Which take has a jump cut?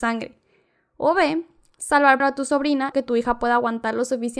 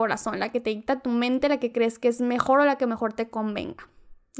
first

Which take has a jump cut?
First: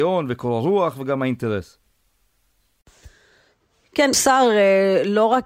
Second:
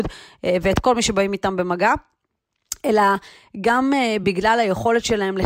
first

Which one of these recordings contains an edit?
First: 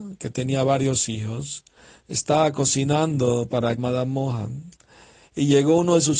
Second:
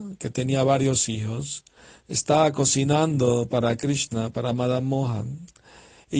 first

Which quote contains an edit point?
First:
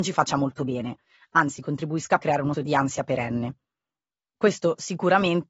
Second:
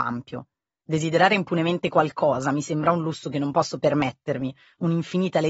first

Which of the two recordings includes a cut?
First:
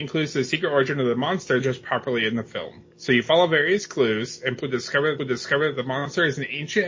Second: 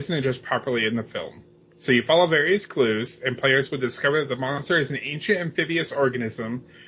first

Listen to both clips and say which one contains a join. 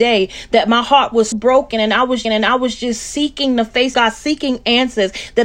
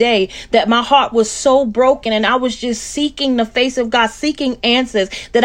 first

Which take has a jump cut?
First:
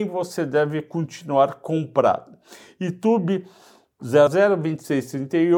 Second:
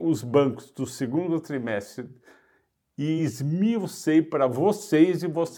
first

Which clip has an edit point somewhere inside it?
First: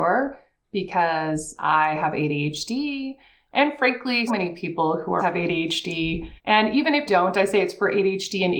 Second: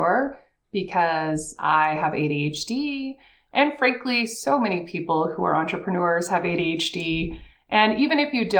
first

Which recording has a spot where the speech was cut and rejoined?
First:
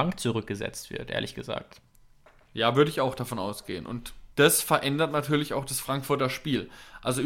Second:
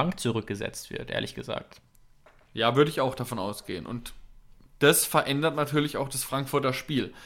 first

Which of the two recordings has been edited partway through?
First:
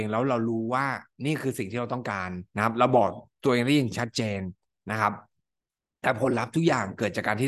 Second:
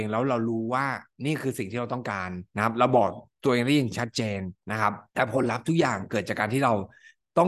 second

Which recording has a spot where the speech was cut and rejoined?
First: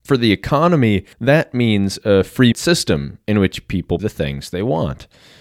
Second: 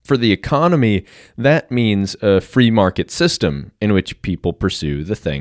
first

